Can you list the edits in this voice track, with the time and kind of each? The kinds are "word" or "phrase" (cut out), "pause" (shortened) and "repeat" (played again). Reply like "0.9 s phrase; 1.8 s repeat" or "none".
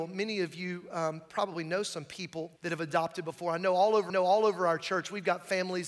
2.6 s pause; 4.1 s repeat